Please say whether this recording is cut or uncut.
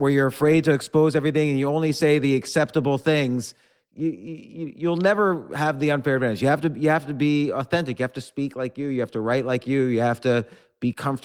uncut